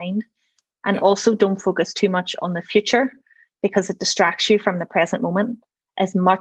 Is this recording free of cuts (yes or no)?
yes